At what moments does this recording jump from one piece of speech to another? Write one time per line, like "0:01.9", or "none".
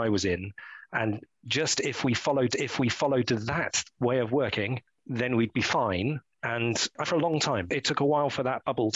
0:02.5
0:07.0

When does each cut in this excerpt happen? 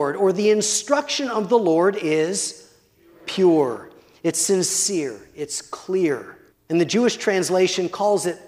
0:06.5

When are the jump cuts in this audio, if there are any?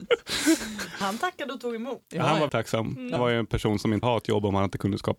0:01.0
0:02.5
0:03.2
0:04.0

